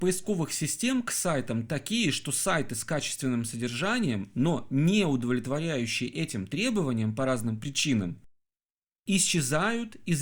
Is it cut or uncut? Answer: uncut